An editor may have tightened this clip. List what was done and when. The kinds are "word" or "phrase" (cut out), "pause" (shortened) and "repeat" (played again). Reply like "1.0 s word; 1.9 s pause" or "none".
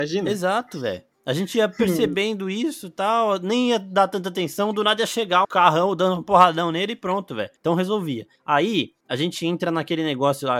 5.4 s word